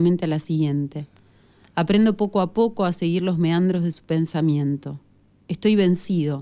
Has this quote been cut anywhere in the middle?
no; 0 cuts

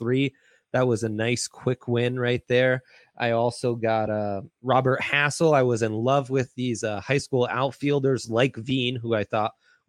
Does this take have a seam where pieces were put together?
no; 0 cuts

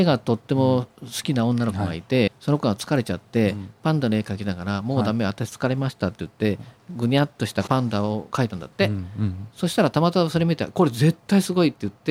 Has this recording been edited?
yes; 1 cut; at 2.3 s

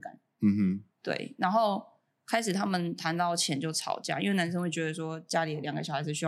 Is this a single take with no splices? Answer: no; 1 cut; at 0.9 s

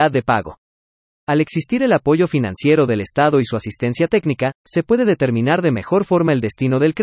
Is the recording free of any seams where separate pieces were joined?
yes; 0 cuts

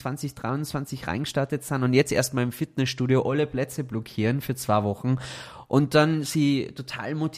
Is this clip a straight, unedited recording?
yes; 0 cuts

